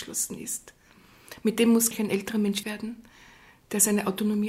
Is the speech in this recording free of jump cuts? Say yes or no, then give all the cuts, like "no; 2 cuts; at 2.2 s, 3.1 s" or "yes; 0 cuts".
no; 2 cuts; at 1.9 s, 2.6 s